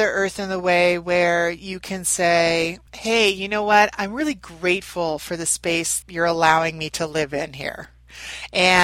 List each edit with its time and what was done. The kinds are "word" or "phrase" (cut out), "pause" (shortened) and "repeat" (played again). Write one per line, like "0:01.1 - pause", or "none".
0:02.9 - pause
0:06.0 - phrase